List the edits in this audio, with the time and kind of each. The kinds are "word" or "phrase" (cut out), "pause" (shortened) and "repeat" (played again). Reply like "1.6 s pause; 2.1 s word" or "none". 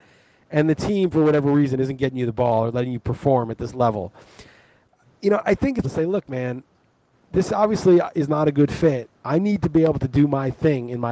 5.4 s word; 5.8 s word; 9.1 s pause

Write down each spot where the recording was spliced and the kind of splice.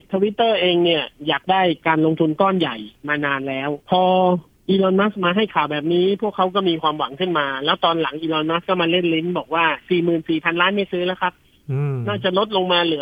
3.8 s pause

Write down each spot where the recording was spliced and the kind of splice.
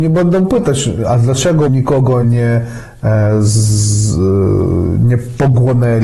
1.7 s word; 2.2 s word

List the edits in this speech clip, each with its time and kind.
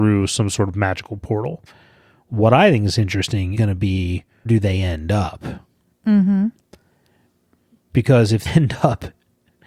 3.6 s word; 4.5 s word; 8.5 s word

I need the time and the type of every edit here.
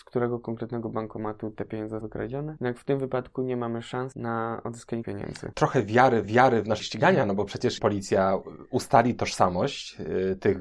2.0 s word; 5.0 s word; 6.2 s repeat; 6.8 s word; 7.8 s word

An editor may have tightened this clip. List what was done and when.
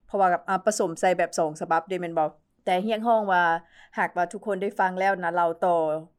2.5 s pause

